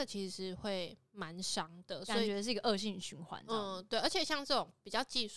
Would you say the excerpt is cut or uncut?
uncut